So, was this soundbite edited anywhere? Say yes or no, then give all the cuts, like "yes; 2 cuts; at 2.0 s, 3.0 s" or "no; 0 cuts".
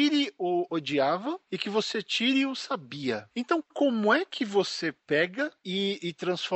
no; 0 cuts